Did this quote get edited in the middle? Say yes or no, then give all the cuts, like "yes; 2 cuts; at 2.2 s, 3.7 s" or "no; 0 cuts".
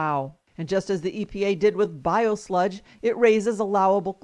no; 0 cuts